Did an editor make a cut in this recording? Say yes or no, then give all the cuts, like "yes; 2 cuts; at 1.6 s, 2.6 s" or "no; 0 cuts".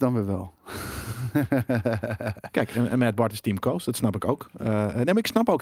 no; 0 cuts